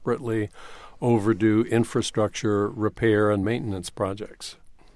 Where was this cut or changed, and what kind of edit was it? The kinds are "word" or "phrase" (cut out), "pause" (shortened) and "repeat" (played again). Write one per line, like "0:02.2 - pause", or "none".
none